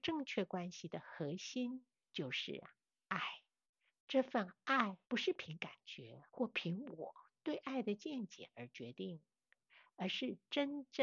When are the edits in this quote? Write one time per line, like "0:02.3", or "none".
0:03.7
0:05.0
0:06.3